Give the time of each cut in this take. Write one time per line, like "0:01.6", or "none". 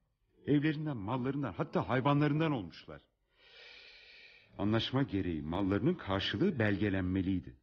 none